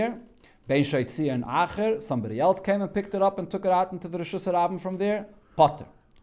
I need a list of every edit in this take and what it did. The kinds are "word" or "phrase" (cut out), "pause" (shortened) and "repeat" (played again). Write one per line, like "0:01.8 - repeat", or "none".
none